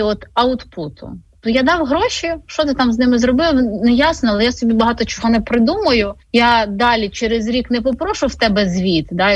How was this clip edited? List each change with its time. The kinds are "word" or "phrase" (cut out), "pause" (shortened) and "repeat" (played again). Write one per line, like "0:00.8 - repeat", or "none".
0:06.2 - pause